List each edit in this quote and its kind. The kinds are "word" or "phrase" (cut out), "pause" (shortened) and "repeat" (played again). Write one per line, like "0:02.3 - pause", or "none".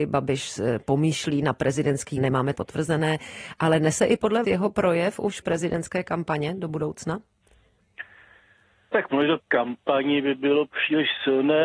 0:02.2 - word
0:02.6 - word
0:04.4 - word
0:05.4 - word
0:09.4 - word